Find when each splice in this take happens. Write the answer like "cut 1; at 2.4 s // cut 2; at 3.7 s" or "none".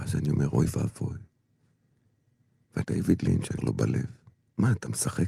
cut 1; at 2.8 s // cut 2; at 3.6 s